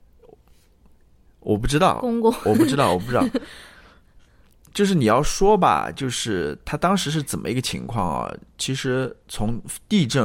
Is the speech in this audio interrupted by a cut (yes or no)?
no